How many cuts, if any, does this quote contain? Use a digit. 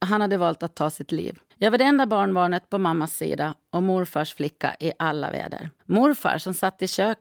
2